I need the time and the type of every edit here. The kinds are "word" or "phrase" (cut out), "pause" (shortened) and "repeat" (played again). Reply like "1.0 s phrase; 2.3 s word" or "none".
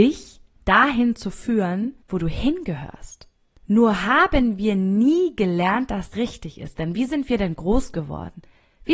2.0 s pause; 3.3 s pause; 6.1 s word